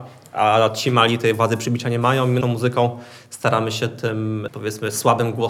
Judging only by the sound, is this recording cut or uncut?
cut